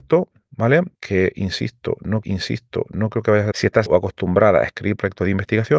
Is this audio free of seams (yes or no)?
no